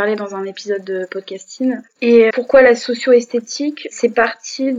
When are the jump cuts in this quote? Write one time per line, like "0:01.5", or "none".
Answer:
0:02.3